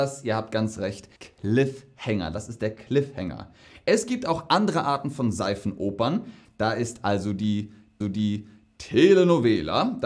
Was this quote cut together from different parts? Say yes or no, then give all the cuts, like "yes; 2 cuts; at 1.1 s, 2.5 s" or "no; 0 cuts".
yes; 2 cuts; at 1.2 s, 8.0 s